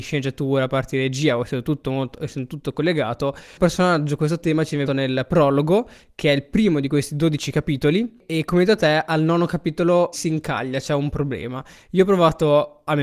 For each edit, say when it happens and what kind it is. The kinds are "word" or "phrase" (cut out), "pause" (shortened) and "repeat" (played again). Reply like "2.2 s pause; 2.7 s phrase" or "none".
4.9 s word; 10.1 s word